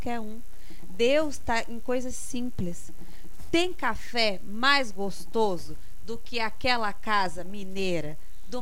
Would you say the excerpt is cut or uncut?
uncut